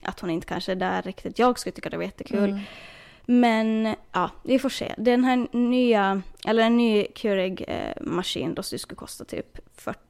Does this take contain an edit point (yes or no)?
no